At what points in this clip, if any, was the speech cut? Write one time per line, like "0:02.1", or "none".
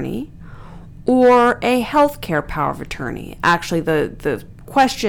none